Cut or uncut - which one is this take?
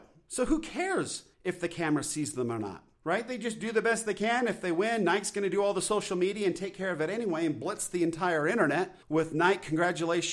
cut